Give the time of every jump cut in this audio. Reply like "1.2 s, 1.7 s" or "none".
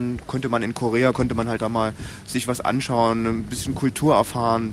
1.6 s